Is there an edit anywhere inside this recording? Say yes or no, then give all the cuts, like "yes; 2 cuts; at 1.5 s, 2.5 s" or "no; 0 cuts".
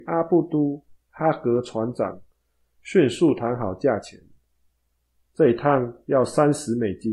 no; 0 cuts